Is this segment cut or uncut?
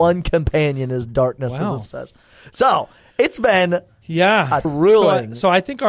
cut